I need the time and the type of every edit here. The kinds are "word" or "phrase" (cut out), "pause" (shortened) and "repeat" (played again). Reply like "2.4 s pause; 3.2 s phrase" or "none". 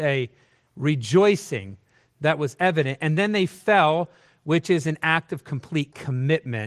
none